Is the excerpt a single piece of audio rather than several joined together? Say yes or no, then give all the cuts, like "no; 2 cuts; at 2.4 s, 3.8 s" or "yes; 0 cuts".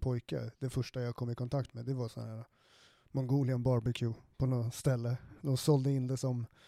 yes; 0 cuts